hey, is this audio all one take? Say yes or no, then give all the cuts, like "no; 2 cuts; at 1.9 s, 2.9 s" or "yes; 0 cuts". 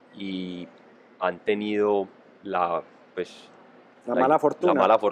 yes; 0 cuts